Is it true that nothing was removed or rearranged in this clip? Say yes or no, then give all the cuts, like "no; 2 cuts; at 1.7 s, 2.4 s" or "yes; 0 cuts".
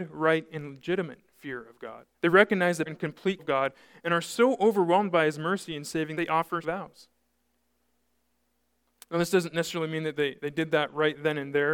no; 5 cuts; at 2.1 s, 2.9 s, 3.4 s, 6.1 s, 6.6 s